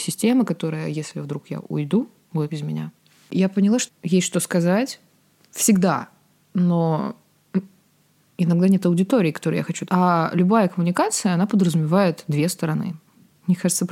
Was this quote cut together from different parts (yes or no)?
yes